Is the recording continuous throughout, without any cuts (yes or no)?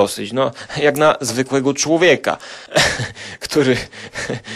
yes